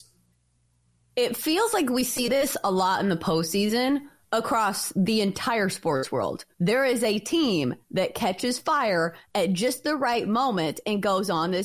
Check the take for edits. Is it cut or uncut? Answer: cut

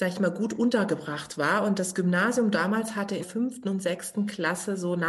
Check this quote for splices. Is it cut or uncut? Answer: cut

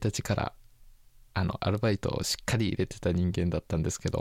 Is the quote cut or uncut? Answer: uncut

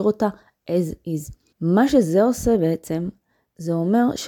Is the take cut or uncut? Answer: cut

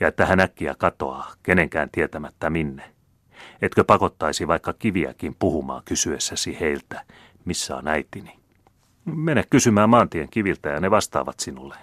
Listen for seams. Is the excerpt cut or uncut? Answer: uncut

